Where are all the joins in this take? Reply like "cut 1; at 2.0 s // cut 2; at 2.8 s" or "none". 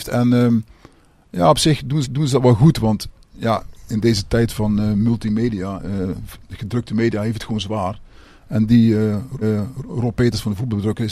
cut 1; at 2.0 s // cut 2; at 9.4 s